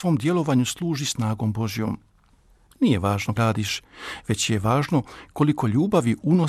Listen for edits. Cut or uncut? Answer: cut